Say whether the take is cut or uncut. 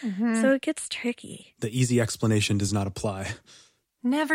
uncut